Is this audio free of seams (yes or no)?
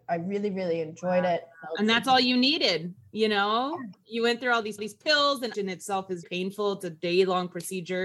no